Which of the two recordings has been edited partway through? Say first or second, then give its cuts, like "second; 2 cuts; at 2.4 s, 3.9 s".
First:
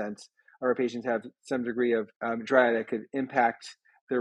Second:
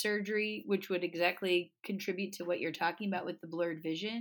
first; 1 cut; at 2.1 s